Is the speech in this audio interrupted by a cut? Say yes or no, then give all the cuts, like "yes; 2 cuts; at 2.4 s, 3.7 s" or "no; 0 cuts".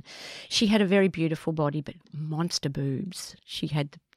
no; 0 cuts